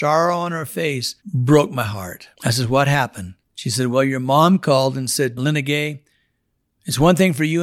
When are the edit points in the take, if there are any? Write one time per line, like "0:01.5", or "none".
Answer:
0:01.2
0:02.3
0:03.4